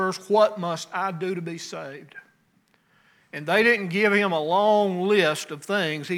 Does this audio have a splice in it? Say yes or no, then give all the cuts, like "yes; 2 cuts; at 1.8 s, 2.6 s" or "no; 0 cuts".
no; 0 cuts